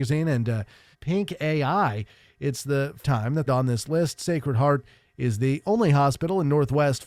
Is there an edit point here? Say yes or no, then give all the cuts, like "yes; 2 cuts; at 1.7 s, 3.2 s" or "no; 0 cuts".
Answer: yes; 3 cuts; at 0.9 s, 3.0 s, 3.5 s